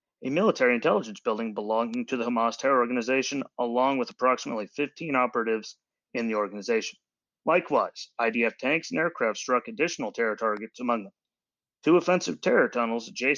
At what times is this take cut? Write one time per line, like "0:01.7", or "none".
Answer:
none